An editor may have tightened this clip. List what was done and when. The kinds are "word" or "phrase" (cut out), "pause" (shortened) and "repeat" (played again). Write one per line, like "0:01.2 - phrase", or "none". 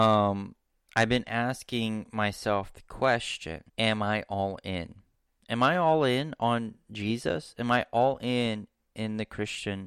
0:03.7 - pause
0:05.1 - pause